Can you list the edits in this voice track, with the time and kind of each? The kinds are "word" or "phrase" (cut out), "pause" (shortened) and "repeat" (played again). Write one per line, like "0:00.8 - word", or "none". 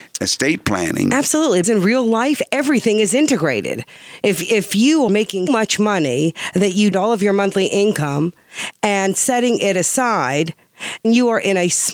0:01.6 - word
0:05.1 - word
0:05.5 - word
0:06.9 - phrase
0:11.0 - word

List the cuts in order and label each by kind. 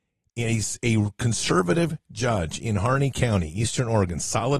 none

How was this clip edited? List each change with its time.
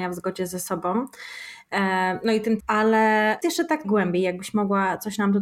0:02.6 - word
0:03.4 - word
0:03.8 - word

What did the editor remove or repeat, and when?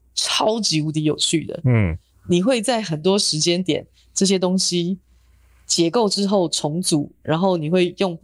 none

